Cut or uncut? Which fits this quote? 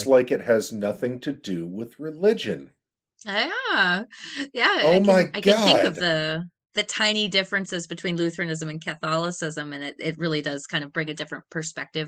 uncut